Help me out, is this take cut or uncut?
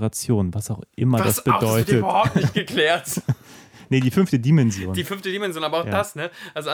uncut